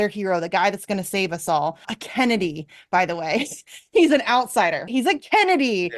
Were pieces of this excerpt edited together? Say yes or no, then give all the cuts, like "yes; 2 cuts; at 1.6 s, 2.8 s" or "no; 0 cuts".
yes; 2 cuts; at 1.8 s, 4.9 s